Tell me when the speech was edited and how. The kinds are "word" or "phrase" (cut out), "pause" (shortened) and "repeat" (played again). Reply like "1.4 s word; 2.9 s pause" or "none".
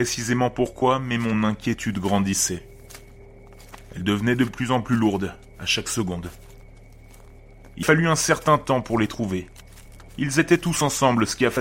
7.8 s word; 10.1 s pause